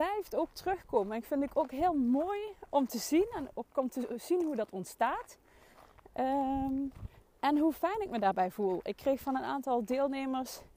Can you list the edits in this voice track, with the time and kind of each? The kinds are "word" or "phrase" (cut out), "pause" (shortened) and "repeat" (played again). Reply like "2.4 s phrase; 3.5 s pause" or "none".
none